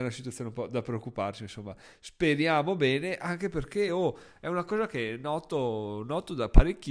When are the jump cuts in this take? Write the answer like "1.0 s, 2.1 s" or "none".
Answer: none